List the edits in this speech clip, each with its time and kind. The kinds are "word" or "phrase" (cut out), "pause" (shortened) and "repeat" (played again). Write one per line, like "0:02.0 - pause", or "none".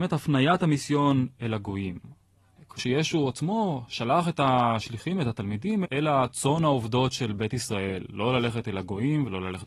0:02.8 - word
0:05.8 - word